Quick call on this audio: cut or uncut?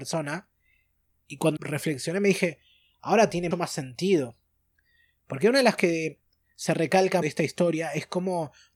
cut